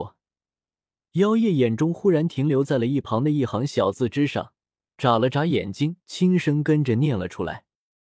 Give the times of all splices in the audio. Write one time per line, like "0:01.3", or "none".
0:06.0